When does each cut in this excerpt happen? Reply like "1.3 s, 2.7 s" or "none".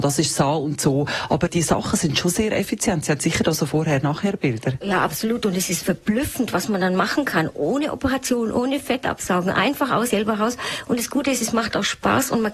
1.5 s, 5.8 s, 10.1 s